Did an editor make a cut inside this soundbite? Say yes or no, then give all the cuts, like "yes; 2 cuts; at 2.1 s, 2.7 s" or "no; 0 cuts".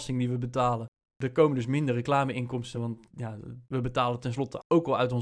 no; 0 cuts